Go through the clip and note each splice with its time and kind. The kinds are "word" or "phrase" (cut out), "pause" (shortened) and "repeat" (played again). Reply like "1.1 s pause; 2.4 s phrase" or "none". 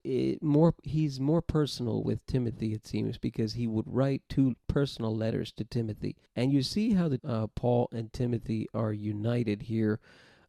6.3 s pause; 7.2 s phrase

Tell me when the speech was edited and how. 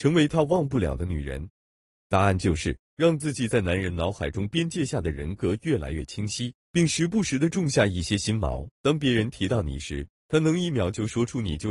8.7 s pause

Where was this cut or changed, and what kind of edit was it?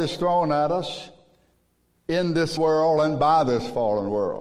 2.6 s word

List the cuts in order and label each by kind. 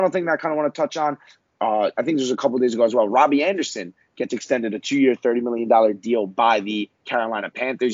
none

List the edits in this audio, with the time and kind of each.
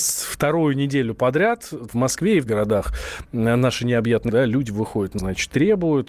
1.9 s word; 2.5 s word; 4.3 s word; 5.2 s word

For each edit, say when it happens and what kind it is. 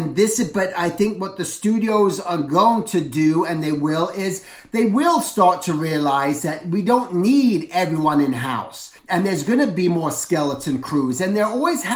9.0 s pause

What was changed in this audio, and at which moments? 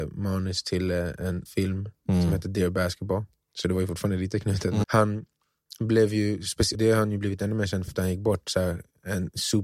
1.5 s word; 4.8 s word; 6.7 s word; 7.9 s word

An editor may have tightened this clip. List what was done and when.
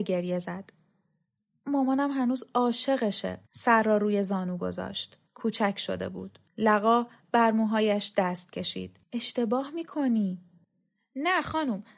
3.5 s pause; 5.3 s pause; 6.5 s pause; 9.0 s pause

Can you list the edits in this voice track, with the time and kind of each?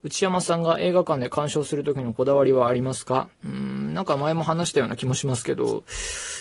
3.3 s pause

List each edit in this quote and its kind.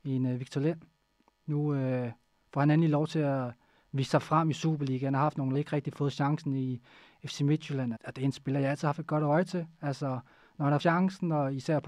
5.5 s word; 7.9 s word; 10.8 s word

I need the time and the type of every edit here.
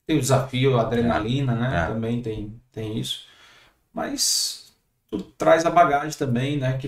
none

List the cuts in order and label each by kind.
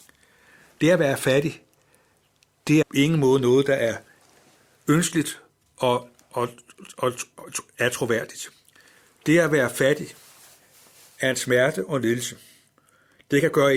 2.8 s word

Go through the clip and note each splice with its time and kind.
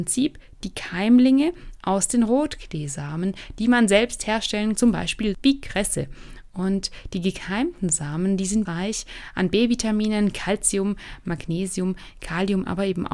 4.7 s word; 5.3 s word; 8.6 s word

